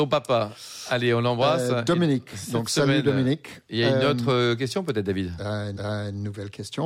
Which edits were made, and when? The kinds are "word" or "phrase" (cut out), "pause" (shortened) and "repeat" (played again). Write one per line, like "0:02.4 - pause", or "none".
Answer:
0:05.8 - repeat